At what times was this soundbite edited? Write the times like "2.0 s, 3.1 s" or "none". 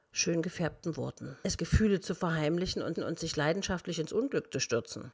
1.6 s, 2.9 s